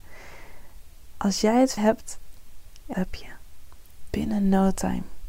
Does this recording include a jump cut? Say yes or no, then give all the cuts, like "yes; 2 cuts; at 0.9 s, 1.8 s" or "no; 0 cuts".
yes; 3 cuts; at 1.8 s, 2.9 s, 4.1 s